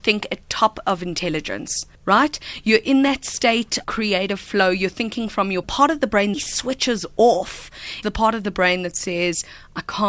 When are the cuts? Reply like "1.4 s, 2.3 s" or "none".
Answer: 1.9 s, 3.8 s, 5.6 s, 6.3 s, 8.0 s